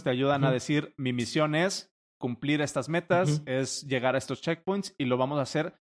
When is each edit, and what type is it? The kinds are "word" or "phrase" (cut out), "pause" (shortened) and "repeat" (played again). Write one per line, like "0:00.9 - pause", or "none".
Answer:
none